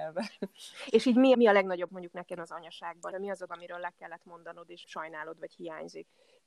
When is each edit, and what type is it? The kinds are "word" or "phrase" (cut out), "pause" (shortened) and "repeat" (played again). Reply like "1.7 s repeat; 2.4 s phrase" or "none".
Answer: 1.3 s word; 1.9 s word; 2.4 s word; 3.1 s word; 3.5 s word; 4.8 s word